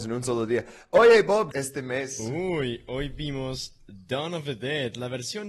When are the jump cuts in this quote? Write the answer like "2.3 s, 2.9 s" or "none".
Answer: 1.5 s